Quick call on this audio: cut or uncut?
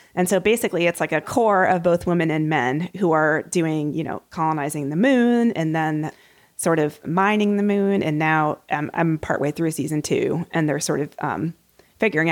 uncut